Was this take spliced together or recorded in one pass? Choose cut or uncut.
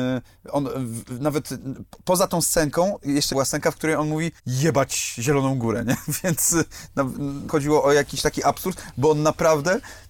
cut